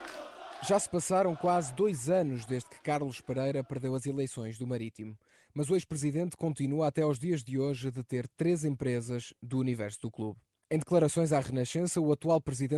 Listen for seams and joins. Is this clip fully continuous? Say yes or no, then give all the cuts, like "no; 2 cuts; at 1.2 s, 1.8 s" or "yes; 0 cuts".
yes; 0 cuts